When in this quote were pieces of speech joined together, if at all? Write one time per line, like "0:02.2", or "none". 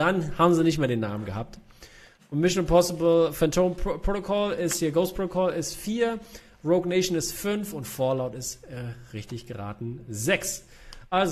none

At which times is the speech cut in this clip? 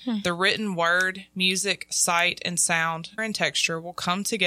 0:03.2

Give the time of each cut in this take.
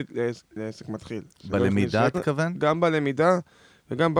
0:02.1

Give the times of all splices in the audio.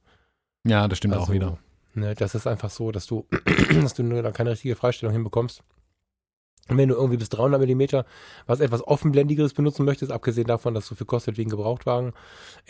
none

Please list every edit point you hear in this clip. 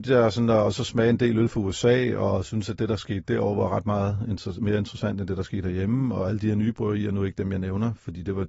none

